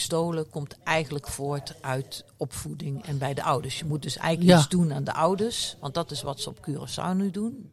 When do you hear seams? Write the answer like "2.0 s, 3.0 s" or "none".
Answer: none